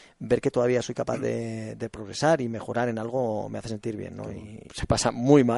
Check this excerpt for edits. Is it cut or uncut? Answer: cut